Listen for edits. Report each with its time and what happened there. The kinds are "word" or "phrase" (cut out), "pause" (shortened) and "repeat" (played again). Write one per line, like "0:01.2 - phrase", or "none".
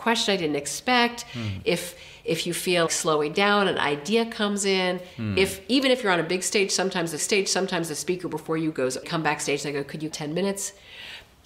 0:02.9 - word
0:07.2 - repeat
0:09.0 - phrase
0:10.1 - word